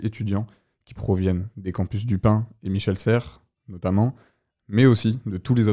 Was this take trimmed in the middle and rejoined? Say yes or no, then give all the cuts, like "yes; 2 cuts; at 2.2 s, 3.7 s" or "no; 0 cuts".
no; 0 cuts